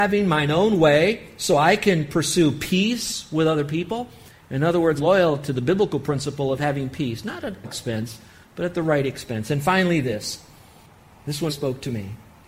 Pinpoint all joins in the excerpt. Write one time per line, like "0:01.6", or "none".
0:05.0
0:07.6
0:11.5

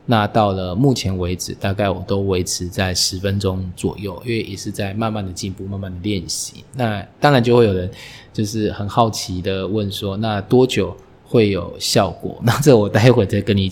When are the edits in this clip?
none

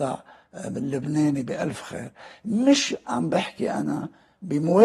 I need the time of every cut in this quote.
none

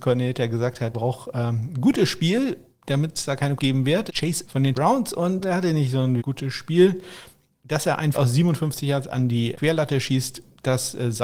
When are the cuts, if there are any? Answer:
0:00.9
0:03.6
0:04.1
0:04.4
0:04.7
0:05.4
0:06.2
0:08.1
0:09.5

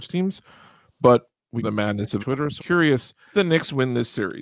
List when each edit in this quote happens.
0:01.6
0:02.2
0:02.6
0:03.3

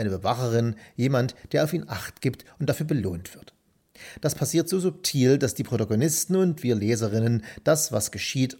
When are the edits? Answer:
none

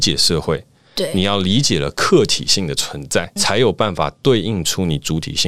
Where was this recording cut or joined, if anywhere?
0:03.4

